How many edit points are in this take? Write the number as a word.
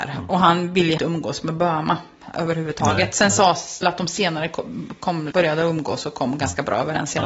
three